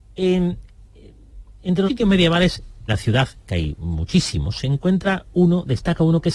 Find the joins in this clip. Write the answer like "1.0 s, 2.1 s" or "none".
1.9 s, 2.9 s